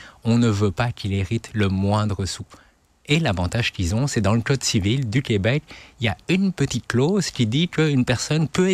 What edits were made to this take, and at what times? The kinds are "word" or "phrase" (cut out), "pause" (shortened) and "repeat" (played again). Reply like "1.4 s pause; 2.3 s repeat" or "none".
none